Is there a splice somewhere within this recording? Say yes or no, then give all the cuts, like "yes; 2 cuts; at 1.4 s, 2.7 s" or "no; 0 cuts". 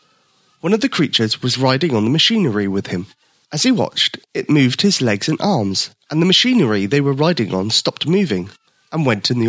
yes; 1 cut; at 3.2 s